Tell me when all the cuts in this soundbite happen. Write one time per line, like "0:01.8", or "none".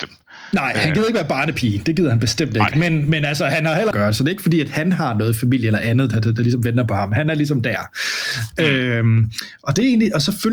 0:03.9